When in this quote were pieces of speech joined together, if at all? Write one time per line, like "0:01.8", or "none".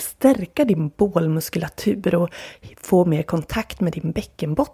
none